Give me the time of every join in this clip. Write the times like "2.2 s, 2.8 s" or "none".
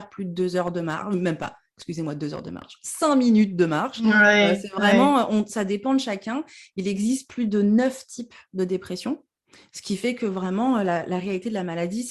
none